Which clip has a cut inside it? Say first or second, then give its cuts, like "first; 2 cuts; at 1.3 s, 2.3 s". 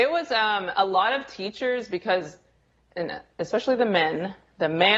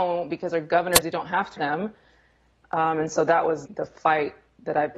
second; 3 cuts; at 1.0 s, 1.6 s, 3.7 s